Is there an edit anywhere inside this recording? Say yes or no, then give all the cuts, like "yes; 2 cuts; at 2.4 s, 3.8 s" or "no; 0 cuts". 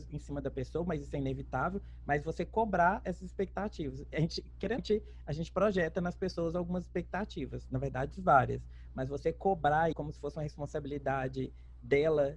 yes; 2 cuts; at 4.8 s, 9.9 s